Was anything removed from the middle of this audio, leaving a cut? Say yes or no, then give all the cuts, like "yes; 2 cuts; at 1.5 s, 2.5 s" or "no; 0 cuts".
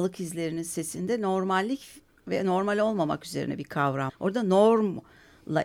yes; 1 cut; at 4.1 s